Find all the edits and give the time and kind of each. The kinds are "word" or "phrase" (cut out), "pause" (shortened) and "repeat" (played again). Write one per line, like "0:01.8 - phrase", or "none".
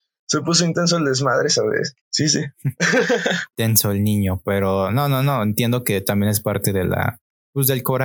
0:02.0 - pause